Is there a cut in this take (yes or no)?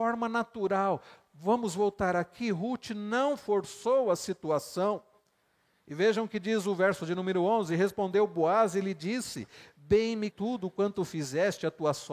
yes